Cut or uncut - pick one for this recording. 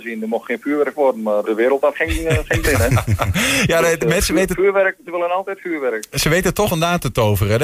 cut